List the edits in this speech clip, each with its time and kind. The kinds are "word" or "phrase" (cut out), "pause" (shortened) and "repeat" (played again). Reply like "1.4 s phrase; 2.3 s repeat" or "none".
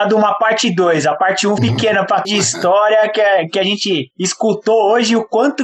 1.6 s word; 2.2 s word; 4.1 s pause